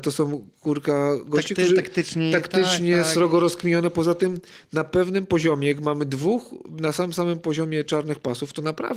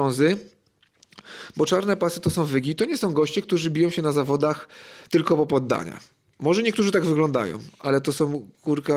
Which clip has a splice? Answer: second; 1 cut; at 5.1 s

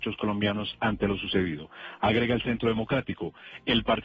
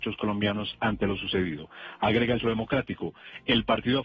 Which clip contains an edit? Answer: second; 1 cut; at 2.4 s

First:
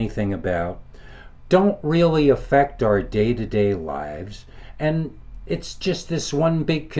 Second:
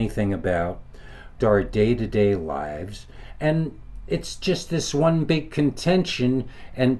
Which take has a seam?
second; 1 cut; at 1.4 s

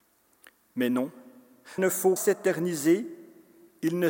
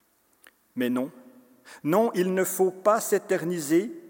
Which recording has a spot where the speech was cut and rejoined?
first; 2 cuts; at 1.8 s, 2.2 s

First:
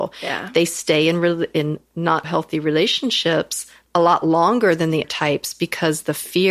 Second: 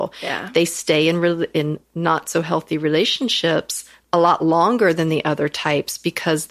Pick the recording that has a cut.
first; 2 cuts; at 2.2 s, 5.0 s

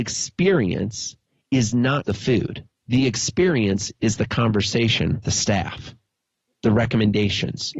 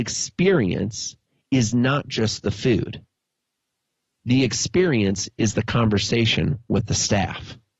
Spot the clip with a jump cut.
first; 3 cuts; at 2.0 s, 2.8 s, 5.2 s

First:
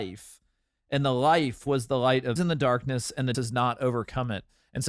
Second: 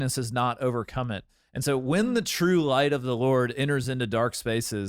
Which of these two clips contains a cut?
first; 2 cuts; at 2.4 s, 3.3 s

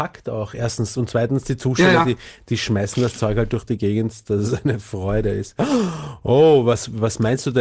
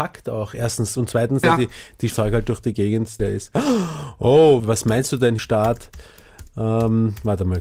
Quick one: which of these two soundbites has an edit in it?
second; 5 cuts; at 1.4 s, 2.1 s, 3.2 s, 4.6 s, 5.4 s

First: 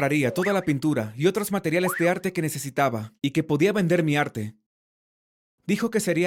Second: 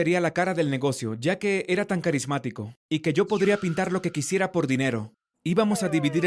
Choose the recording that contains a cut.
second; 1 cut; at 5.3 s

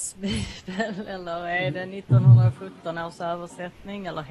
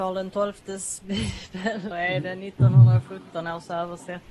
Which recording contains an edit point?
second; 1 cut; at 1.9 s

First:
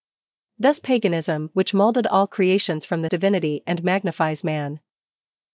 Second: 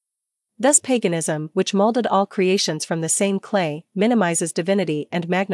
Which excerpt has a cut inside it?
first; 1 cut; at 3.1 s

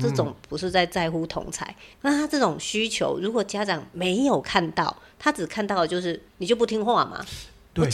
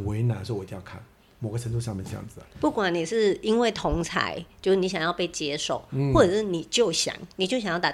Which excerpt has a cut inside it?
first; 2 cuts; at 1.9 s, 6.3 s

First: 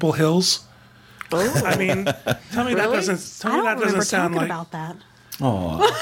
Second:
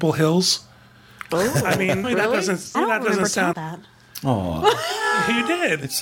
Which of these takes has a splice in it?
second; 3 cuts; at 2.0 s, 2.7 s, 3.5 s

